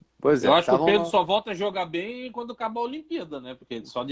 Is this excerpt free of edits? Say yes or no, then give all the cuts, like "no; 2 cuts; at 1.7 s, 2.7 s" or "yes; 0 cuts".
yes; 0 cuts